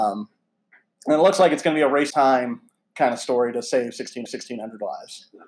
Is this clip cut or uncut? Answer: cut